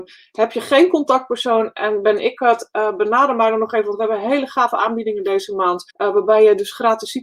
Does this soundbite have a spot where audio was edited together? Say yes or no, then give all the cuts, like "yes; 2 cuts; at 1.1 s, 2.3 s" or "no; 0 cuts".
yes; 1 cut; at 5.9 s